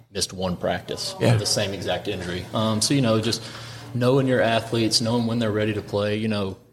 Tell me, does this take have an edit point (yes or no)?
no